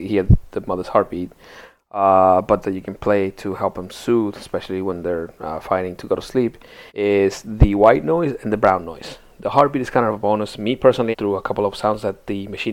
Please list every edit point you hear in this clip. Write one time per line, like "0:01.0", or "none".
0:02.6
0:06.9
0:11.1